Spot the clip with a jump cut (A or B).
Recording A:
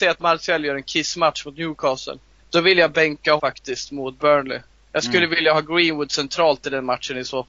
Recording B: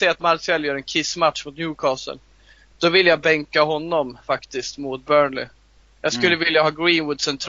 A